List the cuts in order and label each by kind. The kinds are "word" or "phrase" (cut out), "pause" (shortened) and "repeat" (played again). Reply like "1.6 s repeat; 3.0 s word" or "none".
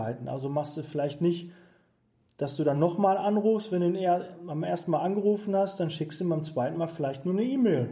none